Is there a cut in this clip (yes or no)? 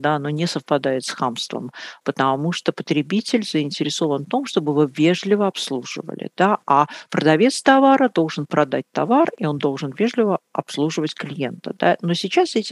no